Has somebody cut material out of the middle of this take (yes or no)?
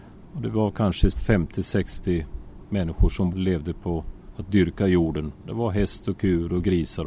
yes